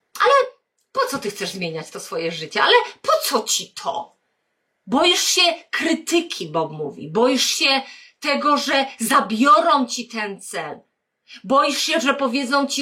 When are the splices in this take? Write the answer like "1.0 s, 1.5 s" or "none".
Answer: none